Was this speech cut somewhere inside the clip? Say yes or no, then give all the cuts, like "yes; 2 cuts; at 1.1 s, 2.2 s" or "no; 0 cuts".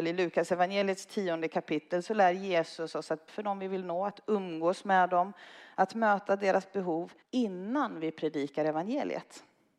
yes; 2 cuts; at 3.3 s, 7.2 s